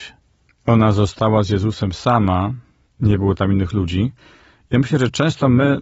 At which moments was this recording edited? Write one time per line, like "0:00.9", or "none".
none